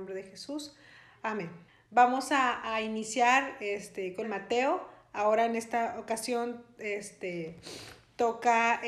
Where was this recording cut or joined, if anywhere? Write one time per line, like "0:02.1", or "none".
0:01.7
0:04.2